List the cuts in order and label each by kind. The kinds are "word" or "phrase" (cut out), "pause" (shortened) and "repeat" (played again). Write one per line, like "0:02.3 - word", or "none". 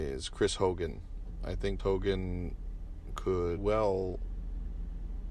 0:01.8 - word
0:03.6 - word